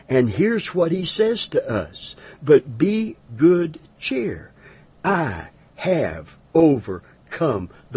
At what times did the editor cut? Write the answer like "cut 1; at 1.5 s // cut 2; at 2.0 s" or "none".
cut 1; at 3.3 s